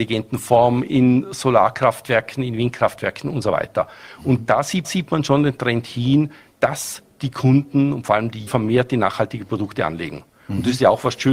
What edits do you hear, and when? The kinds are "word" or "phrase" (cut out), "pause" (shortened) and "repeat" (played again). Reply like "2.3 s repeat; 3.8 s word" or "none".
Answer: 4.8 s repeat; 8.5 s phrase